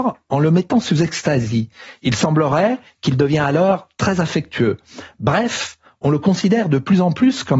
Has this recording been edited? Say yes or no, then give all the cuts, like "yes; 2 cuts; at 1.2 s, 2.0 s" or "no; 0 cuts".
no; 0 cuts